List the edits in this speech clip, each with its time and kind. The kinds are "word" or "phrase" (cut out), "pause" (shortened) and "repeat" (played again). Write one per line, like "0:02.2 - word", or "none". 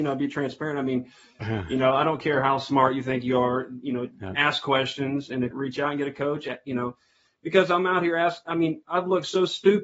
0:05.5 - phrase